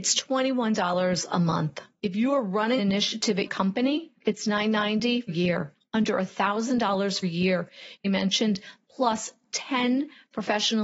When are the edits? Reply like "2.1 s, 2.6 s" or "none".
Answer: 1.9 s, 2.8 s, 3.5 s, 4.2 s, 5.3 s, 7.2 s, 8.0 s